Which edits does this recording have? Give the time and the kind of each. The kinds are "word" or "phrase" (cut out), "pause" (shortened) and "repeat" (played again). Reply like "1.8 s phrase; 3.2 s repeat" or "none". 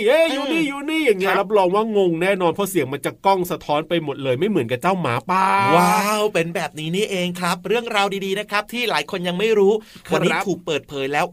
none